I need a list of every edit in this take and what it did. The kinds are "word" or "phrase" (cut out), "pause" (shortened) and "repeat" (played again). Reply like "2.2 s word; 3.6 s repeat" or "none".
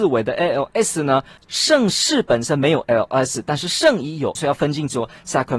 1.4 s pause; 2.8 s word; 4.4 s phrase